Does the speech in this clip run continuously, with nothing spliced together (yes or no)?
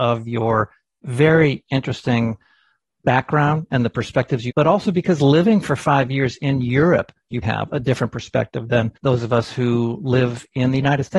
no